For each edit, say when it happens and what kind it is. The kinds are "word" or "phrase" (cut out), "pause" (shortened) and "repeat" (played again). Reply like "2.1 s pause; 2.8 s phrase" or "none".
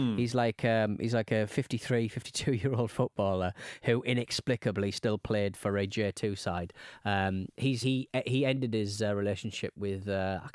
7.8 s word